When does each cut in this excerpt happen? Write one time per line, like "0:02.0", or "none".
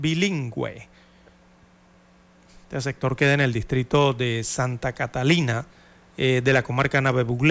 none